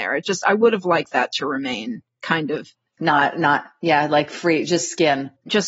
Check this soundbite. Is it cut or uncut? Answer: uncut